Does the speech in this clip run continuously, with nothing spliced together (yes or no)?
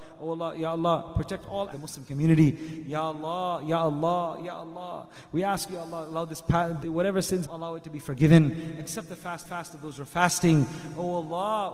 no